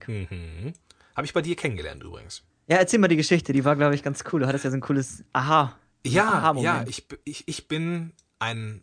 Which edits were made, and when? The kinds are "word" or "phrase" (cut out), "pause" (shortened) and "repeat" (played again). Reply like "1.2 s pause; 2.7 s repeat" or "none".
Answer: 2.5 s pause